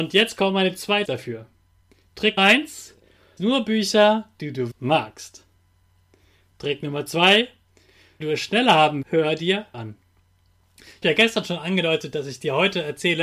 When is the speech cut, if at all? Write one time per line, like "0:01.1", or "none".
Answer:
0:01.1
0:02.4
0:03.4
0:04.7
0:08.2
0:09.0
0:09.7
0:11.0